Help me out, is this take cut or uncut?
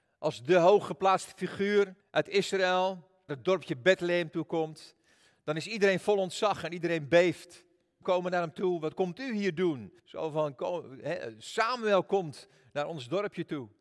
cut